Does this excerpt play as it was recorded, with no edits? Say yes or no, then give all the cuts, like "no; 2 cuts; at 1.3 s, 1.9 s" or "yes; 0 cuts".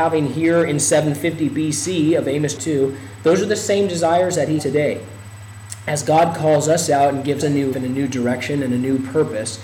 no; 4 cuts; at 2.6 s, 4.6 s, 7.4 s, 7.7 s